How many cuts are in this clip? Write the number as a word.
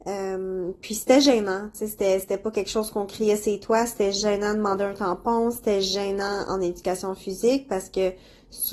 zero